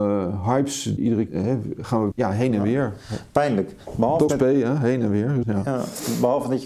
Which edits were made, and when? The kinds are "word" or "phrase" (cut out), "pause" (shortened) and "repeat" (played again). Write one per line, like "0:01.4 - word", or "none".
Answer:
0:01.0 - word
0:01.3 - word
0:02.1 - word
0:04.3 - word
0:05.4 - word